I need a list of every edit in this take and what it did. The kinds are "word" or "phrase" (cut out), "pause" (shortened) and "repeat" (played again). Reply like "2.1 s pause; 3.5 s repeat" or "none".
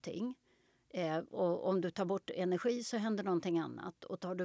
none